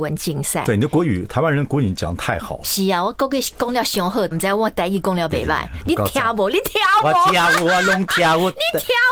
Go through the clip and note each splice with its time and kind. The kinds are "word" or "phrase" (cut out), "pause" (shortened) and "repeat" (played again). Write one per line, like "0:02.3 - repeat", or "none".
0:04.3 - phrase